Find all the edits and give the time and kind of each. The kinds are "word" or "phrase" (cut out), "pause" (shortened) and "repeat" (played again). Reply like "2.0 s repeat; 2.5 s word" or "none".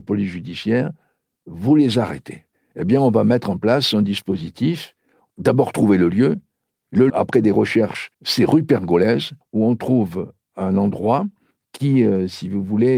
7.1 s word; 8.1 s pause

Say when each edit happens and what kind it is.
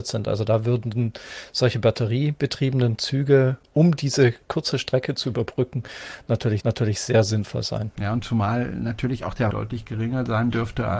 6.6 s repeat; 7.9 s pause; 9.5 s phrase

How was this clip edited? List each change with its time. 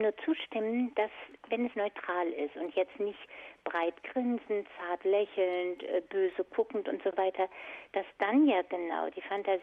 1.7 s phrase

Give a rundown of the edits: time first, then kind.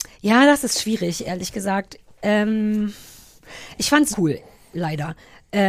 4.1 s word

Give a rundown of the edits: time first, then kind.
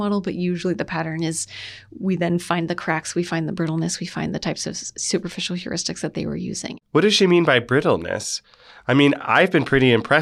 6.8 s pause

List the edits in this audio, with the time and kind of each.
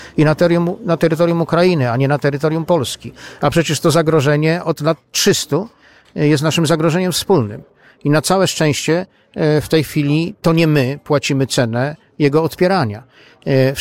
none

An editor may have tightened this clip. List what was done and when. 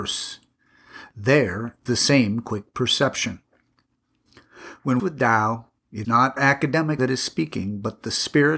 1.9 s word; 5.0 s phrase; 6.0 s word; 6.4 s word; 7.0 s word

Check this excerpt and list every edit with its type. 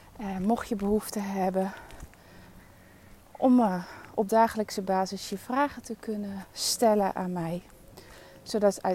none

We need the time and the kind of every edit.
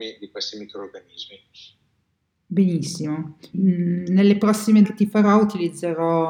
3.5 s word; 4.8 s word

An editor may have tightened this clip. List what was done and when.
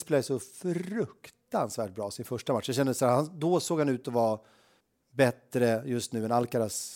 4.8 s pause

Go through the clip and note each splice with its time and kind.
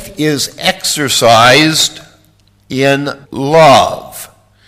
3.2 s pause

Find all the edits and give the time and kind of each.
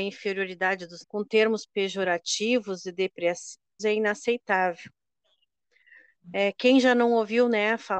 1.0 s word; 3.8 s word

